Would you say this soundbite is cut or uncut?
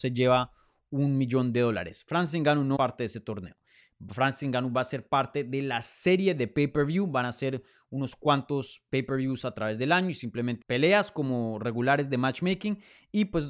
cut